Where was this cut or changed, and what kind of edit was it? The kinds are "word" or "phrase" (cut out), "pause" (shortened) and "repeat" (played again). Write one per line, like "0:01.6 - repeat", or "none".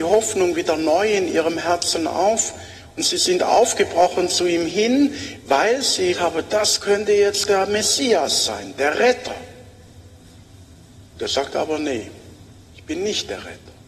0:06.1 - word
0:11.1 - pause